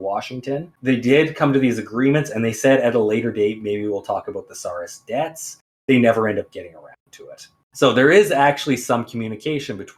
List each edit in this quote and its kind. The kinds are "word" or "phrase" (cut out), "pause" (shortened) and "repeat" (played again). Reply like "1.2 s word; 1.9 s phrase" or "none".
none

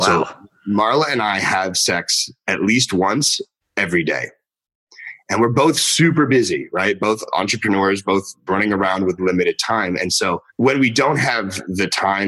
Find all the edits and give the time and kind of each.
3.6 s pause; 8.5 s word; 9.2 s word; 10.5 s pause

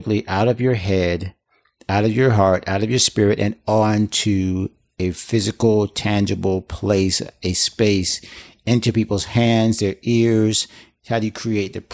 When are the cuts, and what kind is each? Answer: none

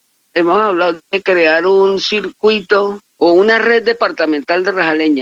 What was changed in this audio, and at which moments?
1.0 s pause

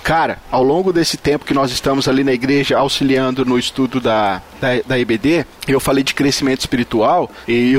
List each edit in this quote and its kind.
none

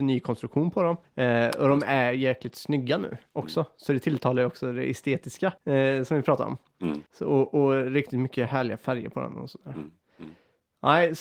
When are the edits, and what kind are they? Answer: 1.0 s pause; 5.6 s pause; 7.1 s pause

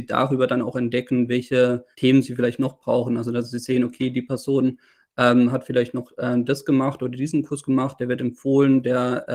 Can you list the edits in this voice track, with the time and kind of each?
1.9 s pause

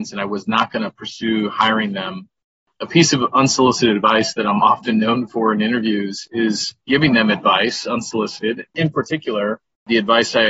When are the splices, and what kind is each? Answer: 6.8 s pause

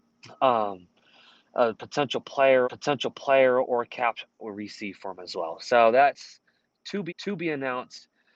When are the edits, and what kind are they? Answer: 2.6 s repeat; 4.4 s phrase; 7.1 s repeat

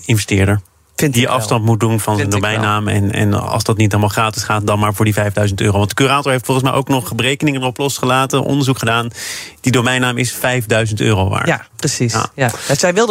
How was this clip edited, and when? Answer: none

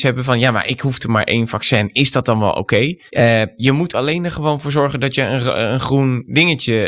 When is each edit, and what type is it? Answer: 3.1 s pause

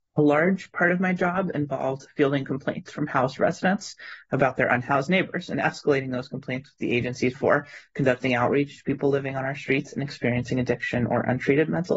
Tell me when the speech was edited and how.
7.3 s word

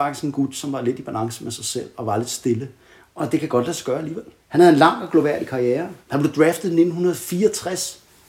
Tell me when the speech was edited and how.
4.4 s pause; 6.0 s pause

